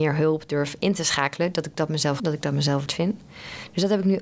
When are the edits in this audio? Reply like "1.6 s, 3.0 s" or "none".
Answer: 2.2 s, 2.9 s